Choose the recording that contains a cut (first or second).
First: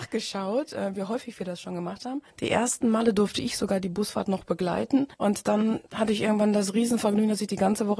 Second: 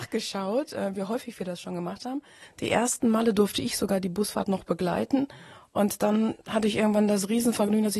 first